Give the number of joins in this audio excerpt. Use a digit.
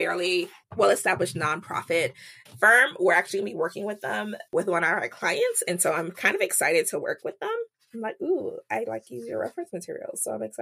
0